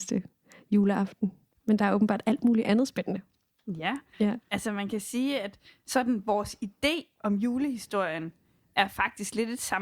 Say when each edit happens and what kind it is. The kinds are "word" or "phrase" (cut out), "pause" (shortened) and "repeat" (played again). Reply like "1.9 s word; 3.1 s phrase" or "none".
none